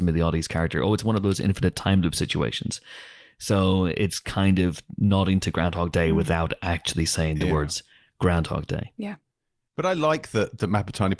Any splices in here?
no; 0 cuts

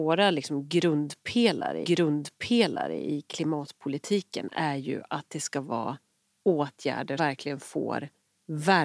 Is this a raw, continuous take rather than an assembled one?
no; 2 cuts; at 1.8 s, 7.2 s

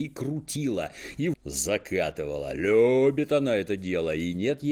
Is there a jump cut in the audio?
yes; 1 cut; at 1.3 s

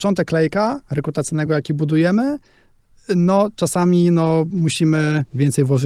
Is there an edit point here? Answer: no; 0 cuts

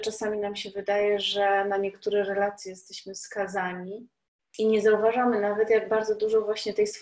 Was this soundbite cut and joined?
no; 0 cuts

